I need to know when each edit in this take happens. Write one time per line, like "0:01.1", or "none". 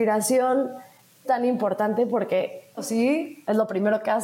0:01.2
0:02.8